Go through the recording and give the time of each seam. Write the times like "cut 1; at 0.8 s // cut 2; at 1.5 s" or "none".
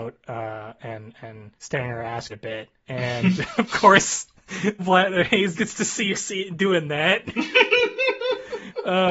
cut 1; at 1.5 s // cut 2; at 2.3 s // cut 3; at 2.8 s // cut 4; at 4.8 s // cut 5; at 5.5 s // cut 6; at 6.1 s